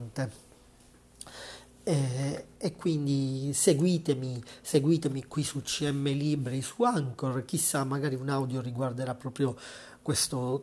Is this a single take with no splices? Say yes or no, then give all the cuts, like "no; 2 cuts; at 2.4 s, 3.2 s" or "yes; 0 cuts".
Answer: yes; 0 cuts